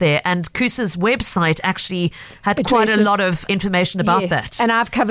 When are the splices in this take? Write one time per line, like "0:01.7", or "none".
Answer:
0:03.5